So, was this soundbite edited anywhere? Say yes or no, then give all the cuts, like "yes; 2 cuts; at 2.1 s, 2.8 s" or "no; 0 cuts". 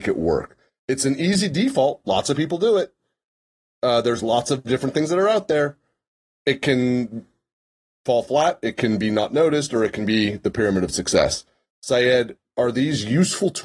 no; 0 cuts